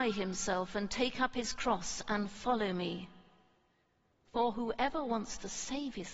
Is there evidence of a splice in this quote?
no; 0 cuts

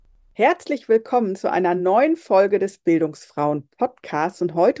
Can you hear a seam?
no; 0 cuts

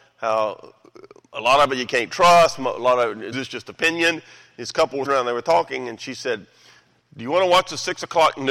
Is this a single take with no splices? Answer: no; 2 cuts; at 3.3 s, 5.0 s

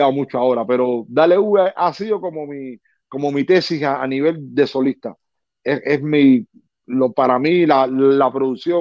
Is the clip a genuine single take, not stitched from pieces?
yes; 0 cuts

